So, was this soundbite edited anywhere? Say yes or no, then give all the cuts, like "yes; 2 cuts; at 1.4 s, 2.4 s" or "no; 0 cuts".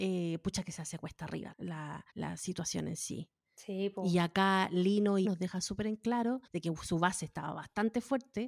yes; 4 cuts; at 1.5 s, 2.1 s, 5.2 s, 6.5 s